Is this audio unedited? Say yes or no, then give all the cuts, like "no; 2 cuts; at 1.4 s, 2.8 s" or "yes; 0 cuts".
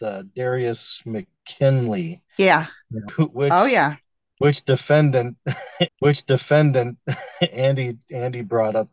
no; 2 cuts; at 3.1 s, 5.9 s